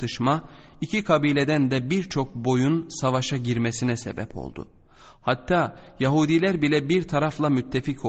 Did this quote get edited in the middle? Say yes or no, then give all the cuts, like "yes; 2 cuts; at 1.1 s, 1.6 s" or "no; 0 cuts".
no; 0 cuts